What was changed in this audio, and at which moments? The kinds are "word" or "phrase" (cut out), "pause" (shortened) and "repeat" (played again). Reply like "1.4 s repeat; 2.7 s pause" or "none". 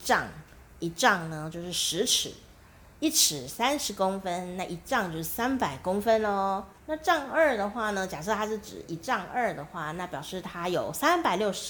6.8 s pause